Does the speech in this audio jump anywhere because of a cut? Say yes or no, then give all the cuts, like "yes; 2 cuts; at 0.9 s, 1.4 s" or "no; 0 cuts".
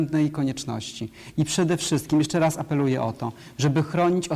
no; 0 cuts